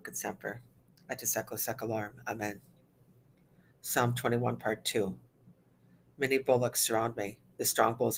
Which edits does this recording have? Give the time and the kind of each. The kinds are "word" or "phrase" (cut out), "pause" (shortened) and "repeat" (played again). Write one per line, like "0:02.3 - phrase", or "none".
none